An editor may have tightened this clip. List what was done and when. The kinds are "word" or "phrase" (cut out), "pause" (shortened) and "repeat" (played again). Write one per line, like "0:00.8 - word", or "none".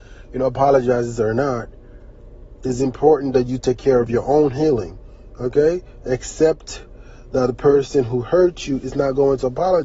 none